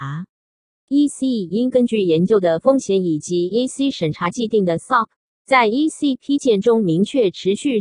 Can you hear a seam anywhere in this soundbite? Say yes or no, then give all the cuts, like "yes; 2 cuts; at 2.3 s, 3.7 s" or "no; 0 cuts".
no; 0 cuts